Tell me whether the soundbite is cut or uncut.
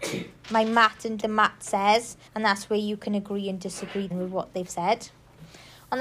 cut